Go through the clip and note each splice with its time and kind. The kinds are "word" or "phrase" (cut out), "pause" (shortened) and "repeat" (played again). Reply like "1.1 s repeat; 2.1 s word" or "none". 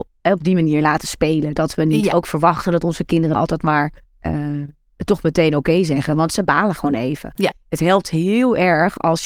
3.3 s word; 4.0 s pause